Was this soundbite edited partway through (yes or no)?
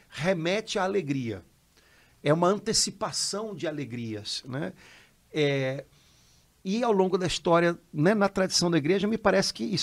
no